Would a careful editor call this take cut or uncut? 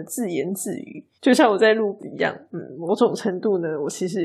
cut